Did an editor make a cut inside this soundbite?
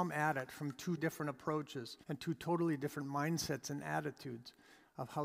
yes; 2 cuts; at 1.0 s, 2.0 s

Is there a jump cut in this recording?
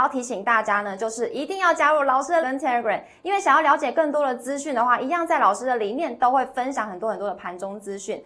yes; 1 cut; at 2.4 s

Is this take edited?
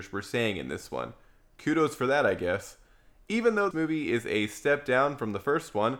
yes; 1 cut; at 3.7 s

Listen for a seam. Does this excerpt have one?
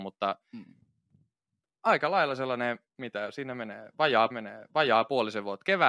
yes; 2 cuts; at 2.9 s, 4.3 s

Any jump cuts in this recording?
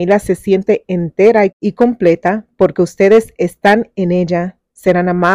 no; 0 cuts

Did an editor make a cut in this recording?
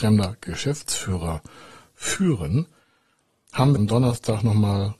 yes; 1 cut; at 3.8 s

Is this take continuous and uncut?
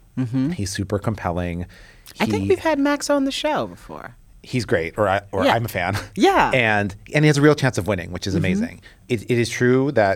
yes; 0 cuts

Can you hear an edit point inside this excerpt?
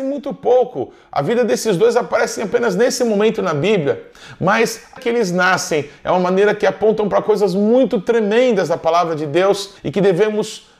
yes; 2 cuts; at 5.0 s, 9.8 s

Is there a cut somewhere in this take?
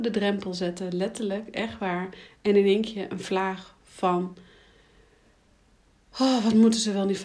no; 0 cuts

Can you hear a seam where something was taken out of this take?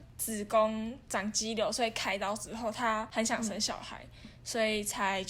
no; 0 cuts

